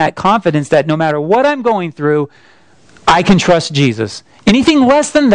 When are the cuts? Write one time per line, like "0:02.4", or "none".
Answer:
none

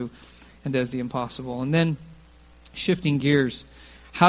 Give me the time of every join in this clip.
none

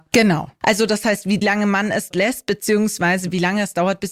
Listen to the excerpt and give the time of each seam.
0:01.4
0:02.1

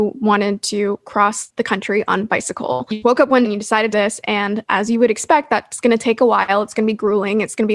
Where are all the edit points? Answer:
0:03.0
0:03.4
0:03.9

